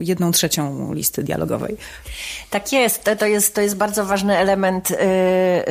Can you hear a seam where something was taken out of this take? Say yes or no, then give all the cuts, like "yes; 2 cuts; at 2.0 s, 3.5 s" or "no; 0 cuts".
no; 0 cuts